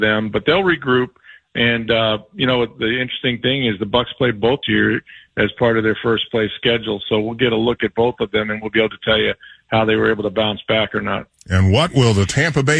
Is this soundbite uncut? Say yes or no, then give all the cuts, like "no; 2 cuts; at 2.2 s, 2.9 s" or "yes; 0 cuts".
no; 1 cut; at 4.6 s